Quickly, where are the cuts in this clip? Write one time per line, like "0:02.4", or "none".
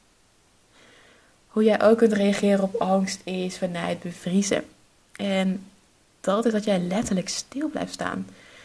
none